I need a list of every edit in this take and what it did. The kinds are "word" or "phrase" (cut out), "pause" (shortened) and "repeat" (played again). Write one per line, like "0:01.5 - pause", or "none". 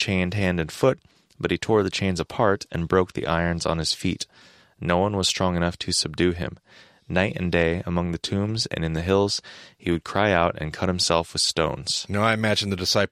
none